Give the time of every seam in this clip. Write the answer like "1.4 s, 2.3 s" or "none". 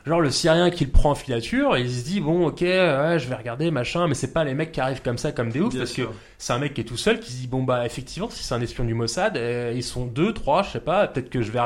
none